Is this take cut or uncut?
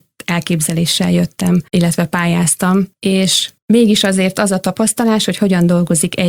cut